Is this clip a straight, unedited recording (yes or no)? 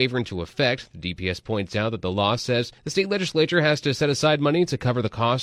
no